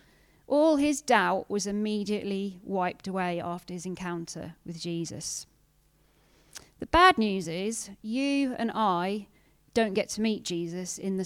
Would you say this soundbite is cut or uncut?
uncut